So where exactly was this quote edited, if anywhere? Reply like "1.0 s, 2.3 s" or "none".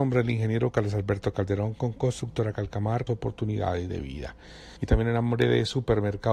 3.1 s, 4.8 s